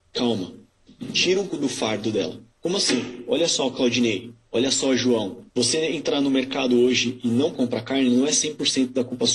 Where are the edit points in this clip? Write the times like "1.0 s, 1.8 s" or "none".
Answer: 1.5 s, 2.5 s, 5.5 s, 7.5 s